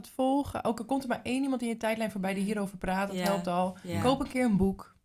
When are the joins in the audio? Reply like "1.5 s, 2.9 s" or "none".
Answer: none